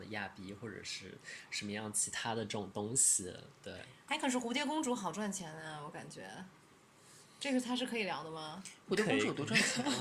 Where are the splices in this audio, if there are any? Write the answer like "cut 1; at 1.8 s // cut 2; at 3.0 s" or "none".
cut 1; at 3.6 s